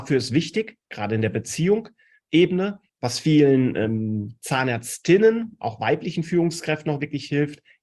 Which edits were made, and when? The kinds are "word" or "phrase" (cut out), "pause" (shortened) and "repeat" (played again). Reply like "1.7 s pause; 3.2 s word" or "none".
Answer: 2.9 s pause